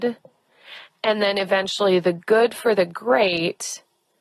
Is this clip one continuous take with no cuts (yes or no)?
yes